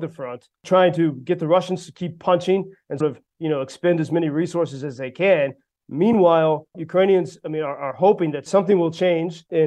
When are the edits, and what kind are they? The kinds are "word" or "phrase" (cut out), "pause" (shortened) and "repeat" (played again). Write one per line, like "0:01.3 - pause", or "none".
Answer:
0:03.0 - word
0:06.7 - word